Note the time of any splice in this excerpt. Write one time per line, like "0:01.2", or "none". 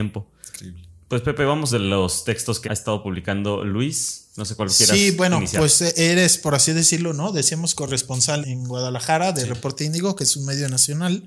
0:01.7
0:02.6
0:08.4